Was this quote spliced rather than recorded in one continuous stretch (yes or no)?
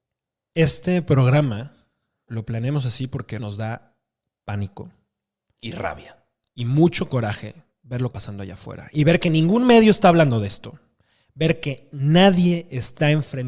yes